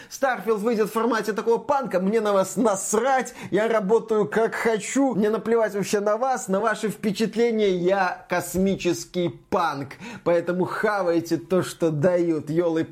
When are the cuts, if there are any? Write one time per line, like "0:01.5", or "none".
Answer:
none

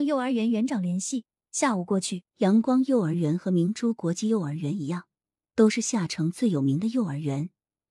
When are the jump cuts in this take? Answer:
0:02.3

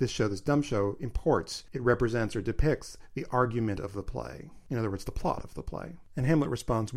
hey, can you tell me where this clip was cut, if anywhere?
none

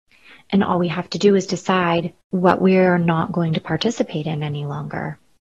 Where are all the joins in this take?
0:02.2

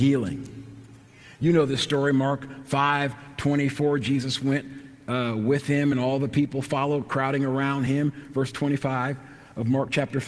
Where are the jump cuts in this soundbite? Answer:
none

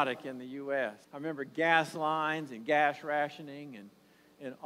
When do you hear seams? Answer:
0:01.0

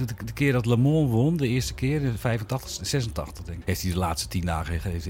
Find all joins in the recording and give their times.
0:03.6

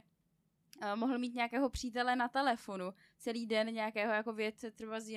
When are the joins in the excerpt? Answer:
none

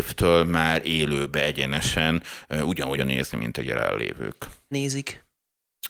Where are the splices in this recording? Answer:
0:03.0
0:04.7

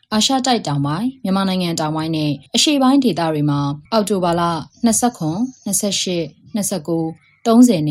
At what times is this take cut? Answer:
0:02.5
0:03.9

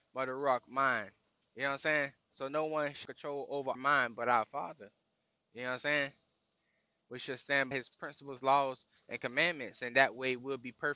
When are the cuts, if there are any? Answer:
0:03.0
0:03.8
0:07.7

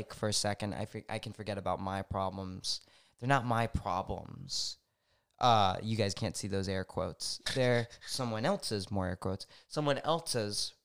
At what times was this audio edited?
none

